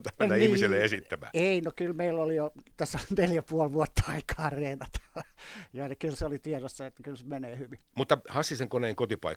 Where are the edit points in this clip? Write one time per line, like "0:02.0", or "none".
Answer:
0:02.7
0:07.9